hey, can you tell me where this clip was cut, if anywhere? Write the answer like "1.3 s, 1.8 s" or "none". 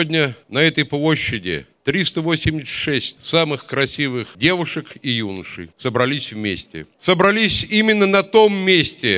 none